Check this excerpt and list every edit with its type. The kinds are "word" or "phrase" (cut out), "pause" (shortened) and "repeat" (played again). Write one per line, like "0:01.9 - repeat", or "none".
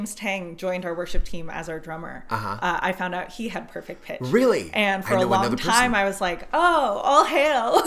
none